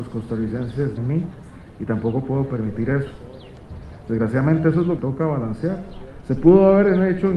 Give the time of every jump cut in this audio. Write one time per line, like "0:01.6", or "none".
0:01.0
0:05.0

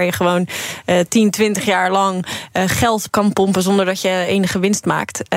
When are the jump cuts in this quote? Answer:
0:03.1

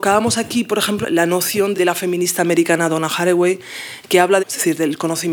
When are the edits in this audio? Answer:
0:01.0
0:01.7
0:04.4

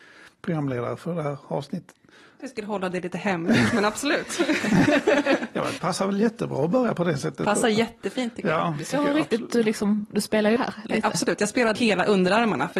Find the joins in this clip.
0:02.4
0:05.8
0:10.6
0:11.7

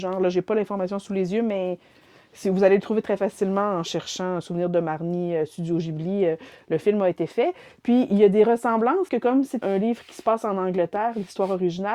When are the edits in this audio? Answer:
0:09.1
0:09.6

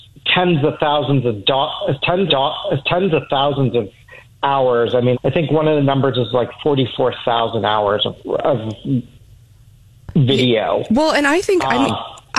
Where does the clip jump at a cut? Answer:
0:02.3
0:05.1
0:08.2

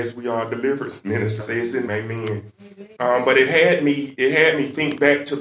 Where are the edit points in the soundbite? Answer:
0:01.4
0:01.9
0:03.0

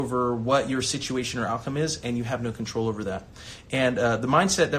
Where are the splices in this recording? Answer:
none

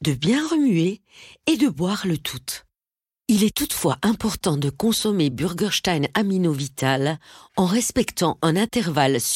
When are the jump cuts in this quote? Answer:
none

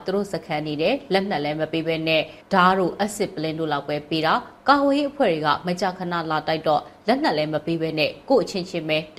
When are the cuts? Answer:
0:02.4

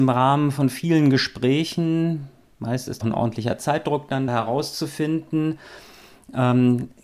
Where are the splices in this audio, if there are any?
0:02.5
0:03.0
0:04.3

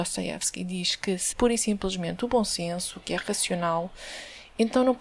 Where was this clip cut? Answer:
0:01.3

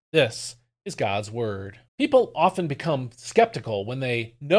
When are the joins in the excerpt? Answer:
0:01.9

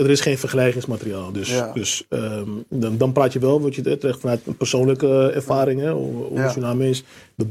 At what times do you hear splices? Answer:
none

